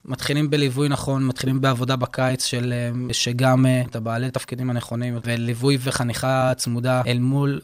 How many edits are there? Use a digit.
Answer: 1